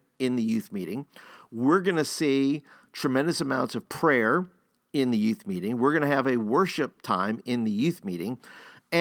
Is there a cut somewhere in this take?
no; 0 cuts

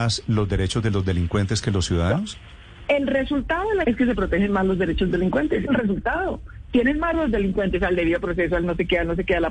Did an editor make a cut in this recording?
yes; 4 cuts; at 3.8 s, 5.1 s, 5.7 s, 7.1 s

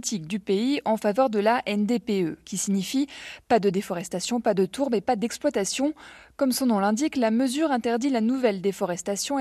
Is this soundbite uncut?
yes; 0 cuts

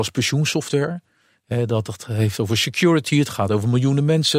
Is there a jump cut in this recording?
no; 0 cuts

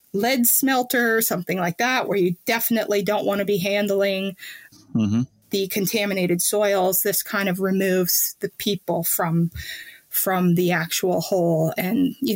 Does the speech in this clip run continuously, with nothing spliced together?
yes; 0 cuts

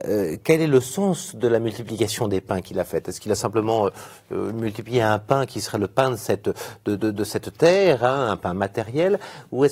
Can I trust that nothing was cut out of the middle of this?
yes; 0 cuts

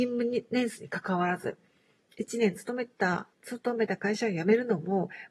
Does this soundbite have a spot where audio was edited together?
yes; 1 cut; at 3.3 s

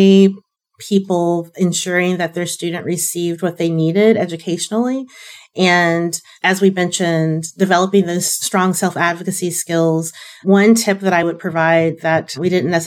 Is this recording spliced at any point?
no; 0 cuts

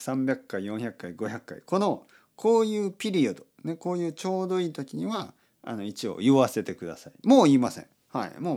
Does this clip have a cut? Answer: no; 0 cuts

